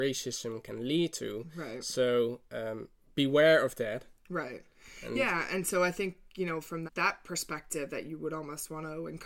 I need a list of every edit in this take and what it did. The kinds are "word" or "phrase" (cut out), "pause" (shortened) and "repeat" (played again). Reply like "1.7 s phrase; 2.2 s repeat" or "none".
6.9 s word